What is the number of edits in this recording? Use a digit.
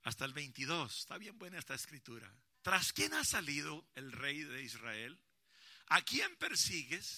1